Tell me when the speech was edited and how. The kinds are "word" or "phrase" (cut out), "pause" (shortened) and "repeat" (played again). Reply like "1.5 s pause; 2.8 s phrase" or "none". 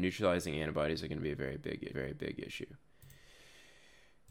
1.9 s repeat